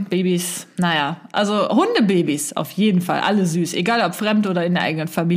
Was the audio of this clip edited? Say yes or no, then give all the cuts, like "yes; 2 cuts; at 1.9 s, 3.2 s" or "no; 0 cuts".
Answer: no; 0 cuts